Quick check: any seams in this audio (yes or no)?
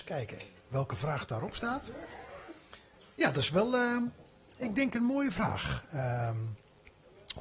no